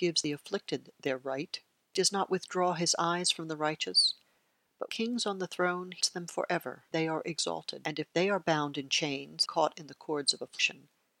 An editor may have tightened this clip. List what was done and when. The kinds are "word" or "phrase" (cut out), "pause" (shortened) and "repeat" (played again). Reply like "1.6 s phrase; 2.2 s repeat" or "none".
6.0 s word; 6.9 s word; 9.5 s word

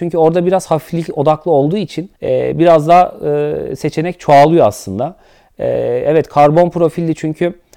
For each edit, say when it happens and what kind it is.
2.2 s pause

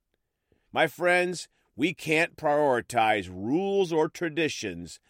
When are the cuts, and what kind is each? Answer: none

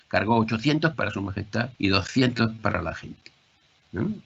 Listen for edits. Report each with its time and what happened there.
0.9 s word; 1.8 s pause

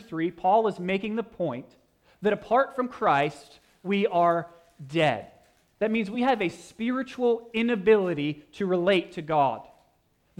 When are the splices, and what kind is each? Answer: none

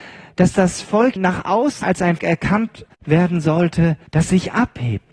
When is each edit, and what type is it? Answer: 1.2 s word; 1.8 s word; 2.2 s word; 2.9 s pause; 4.1 s pause

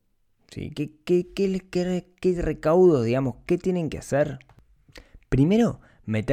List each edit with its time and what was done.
none

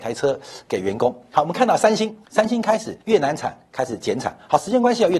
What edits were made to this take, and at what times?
2.2 s pause; 3.0 s pause

